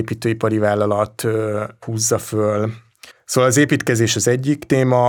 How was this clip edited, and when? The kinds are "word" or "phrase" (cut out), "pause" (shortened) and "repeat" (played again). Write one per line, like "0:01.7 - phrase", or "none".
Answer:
0:03.1 - pause